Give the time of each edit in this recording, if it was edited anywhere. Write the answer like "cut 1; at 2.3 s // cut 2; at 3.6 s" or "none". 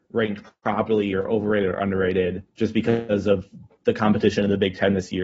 cut 1; at 2.5 s